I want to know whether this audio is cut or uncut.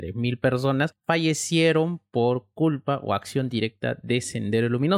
uncut